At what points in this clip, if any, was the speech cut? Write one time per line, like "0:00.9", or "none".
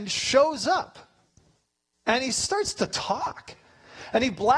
none

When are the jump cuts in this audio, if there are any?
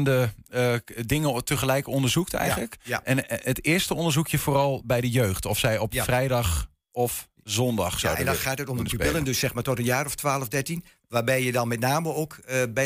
none

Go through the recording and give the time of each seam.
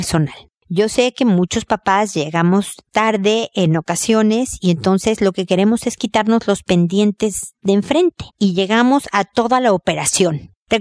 0:08.3

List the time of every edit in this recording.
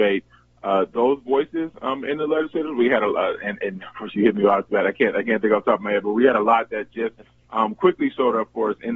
0:00.9

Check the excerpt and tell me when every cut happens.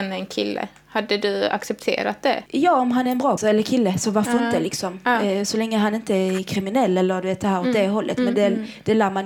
0:02.5
0:03.4

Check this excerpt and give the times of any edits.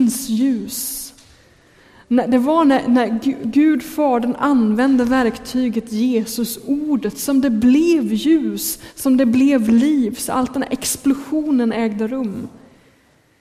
none

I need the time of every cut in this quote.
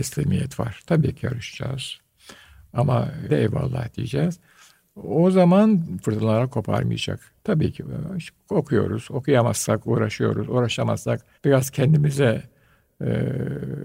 0:03.3
0:06.0
0:07.4
0:11.3

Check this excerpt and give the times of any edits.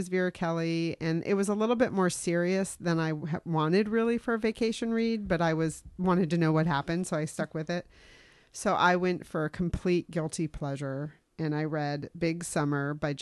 none

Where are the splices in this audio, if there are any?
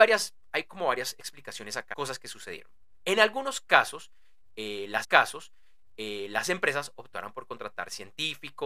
0:01.9
0:05.0

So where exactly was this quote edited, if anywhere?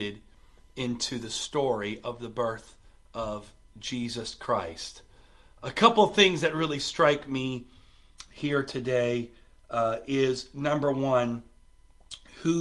none

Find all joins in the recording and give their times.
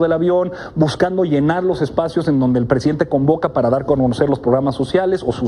none

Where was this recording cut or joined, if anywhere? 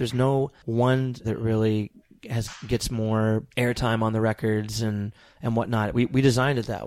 0:01.2
0:03.5

